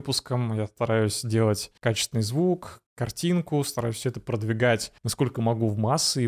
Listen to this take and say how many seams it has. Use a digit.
3